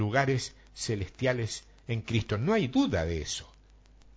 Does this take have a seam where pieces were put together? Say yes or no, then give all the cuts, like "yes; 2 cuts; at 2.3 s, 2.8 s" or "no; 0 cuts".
no; 0 cuts